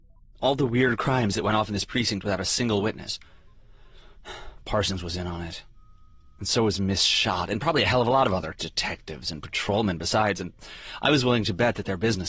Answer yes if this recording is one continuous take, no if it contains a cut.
yes